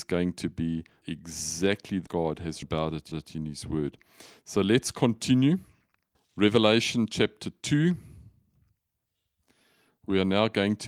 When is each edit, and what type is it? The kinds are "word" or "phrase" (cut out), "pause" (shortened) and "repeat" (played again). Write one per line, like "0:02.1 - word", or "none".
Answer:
0:01.0 - word
0:02.1 - word
0:02.6 - word
0:03.1 - repeat
0:06.1 - pause

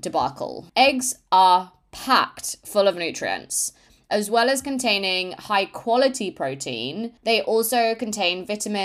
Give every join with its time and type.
none

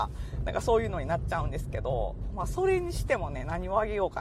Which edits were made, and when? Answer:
none

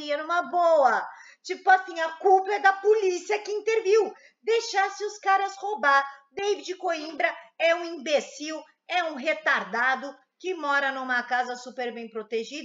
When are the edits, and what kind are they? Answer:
none

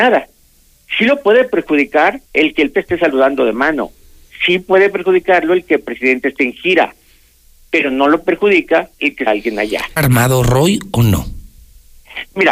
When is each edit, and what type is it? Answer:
0:02.3 - pause
0:02.7 - word
0:08.9 - pause
0:09.3 - word
0:10.0 - word

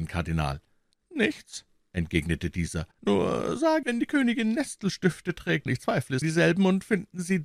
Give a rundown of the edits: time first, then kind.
0:02.9 - pause
0:03.8 - word
0:05.7 - word
0:06.2 - phrase

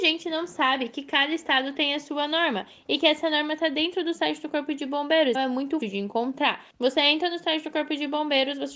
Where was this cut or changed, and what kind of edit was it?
0:05.3 - word
0:05.8 - word
0:06.7 - pause

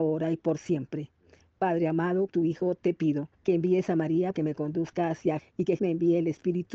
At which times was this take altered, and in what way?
0:02.3 - word
0:03.3 - pause
0:04.3 - word
0:05.4 - word
0:05.8 - word

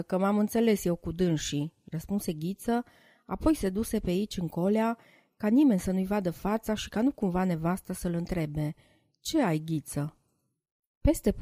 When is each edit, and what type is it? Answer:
none

